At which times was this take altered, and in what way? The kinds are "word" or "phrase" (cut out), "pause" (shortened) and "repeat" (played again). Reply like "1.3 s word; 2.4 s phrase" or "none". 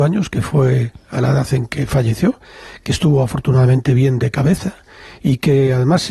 none